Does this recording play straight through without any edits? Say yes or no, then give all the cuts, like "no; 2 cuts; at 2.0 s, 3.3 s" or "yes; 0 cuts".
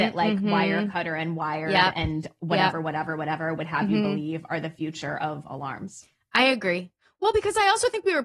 yes; 0 cuts